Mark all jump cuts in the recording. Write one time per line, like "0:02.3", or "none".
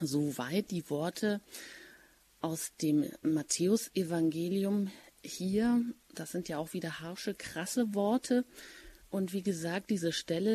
none